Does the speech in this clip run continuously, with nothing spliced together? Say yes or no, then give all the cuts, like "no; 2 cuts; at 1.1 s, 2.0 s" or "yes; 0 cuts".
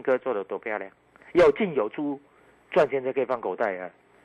yes; 0 cuts